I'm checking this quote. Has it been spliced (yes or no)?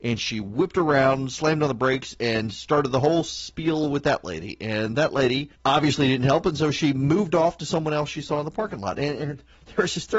yes